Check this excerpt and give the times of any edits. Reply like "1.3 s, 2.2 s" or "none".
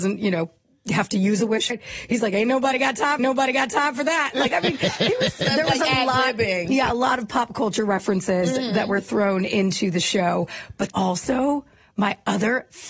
1.7 s, 3.2 s, 10.9 s